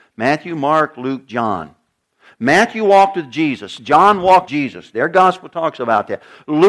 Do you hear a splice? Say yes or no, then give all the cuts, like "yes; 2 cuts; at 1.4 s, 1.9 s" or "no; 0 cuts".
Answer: yes; 1 cut; at 4.5 s